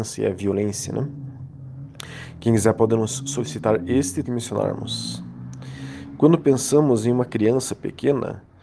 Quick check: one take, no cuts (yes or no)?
no